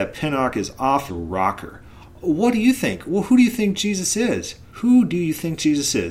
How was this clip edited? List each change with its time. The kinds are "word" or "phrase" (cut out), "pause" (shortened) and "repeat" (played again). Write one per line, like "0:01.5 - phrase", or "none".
0:01.1 - word
0:04.7 - pause